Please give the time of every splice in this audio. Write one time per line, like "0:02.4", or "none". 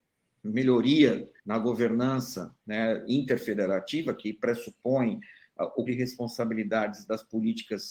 0:01.4
0:02.6
0:05.9